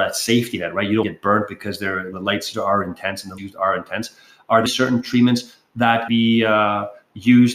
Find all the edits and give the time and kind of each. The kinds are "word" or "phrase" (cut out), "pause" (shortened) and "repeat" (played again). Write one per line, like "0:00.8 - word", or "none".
0:01.0 - word
0:02.1 - word
0:02.5 - word
0:03.4 - word
0:04.7 - word
0:06.1 - word

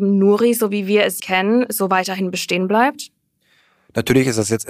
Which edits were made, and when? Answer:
0:01.2 - word

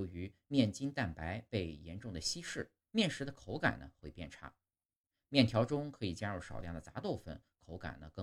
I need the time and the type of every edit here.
0:02.8 - pause

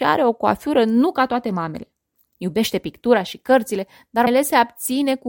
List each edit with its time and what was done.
0:04.3 - word

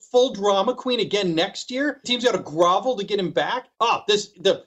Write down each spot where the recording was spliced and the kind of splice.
0:02.0 - word
0:03.7 - pause

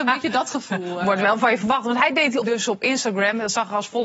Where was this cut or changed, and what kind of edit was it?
0:02.4 - word

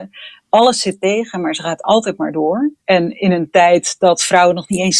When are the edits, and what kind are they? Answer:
0:02.8 - pause

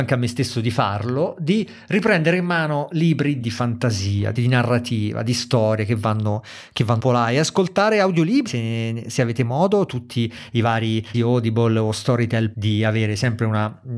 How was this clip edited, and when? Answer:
0:03.4 - word
0:04.4 - word
0:07.0 - word
0:08.5 - word
0:11.1 - word
0:12.5 - word

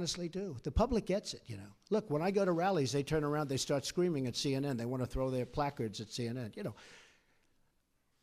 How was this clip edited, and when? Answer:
none

